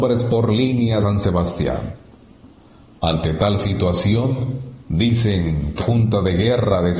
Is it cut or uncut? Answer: cut